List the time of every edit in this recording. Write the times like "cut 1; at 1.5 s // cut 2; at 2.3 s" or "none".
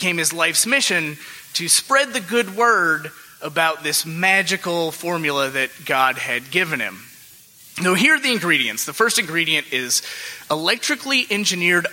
none